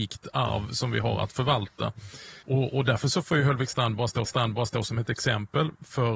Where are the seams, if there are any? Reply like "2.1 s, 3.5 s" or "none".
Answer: 2.4 s, 4.2 s